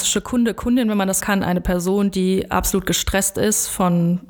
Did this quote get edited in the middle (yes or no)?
yes